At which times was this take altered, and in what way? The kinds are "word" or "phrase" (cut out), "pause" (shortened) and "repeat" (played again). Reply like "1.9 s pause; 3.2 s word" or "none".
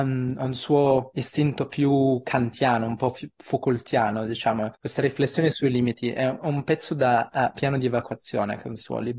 4.7 s pause